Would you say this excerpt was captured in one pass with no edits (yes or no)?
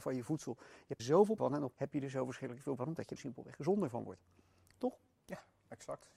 no